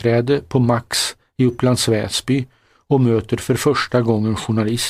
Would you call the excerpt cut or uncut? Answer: uncut